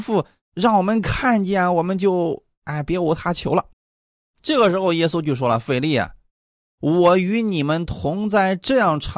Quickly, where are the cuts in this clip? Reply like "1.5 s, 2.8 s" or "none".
3.7 s